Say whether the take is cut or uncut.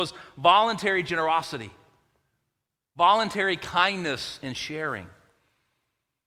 uncut